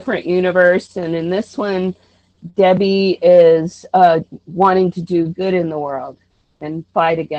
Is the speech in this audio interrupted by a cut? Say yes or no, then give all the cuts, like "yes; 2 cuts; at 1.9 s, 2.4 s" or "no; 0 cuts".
no; 0 cuts